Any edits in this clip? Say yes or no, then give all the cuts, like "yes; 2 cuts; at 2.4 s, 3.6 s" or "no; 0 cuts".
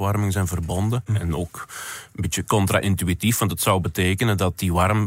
no; 0 cuts